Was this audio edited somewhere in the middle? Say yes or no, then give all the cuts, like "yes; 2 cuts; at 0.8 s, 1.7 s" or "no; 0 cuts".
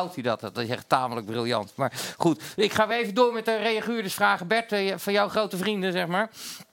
no; 0 cuts